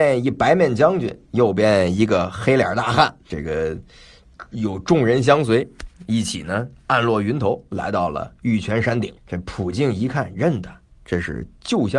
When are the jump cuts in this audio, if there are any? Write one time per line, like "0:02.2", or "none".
0:03.3
0:09.2